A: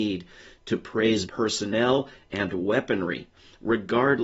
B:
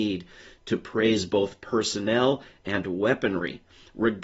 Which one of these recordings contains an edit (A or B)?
A